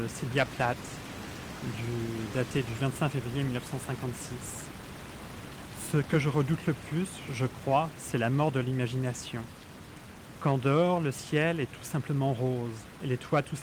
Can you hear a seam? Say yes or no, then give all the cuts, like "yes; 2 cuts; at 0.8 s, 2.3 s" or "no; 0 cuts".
no; 0 cuts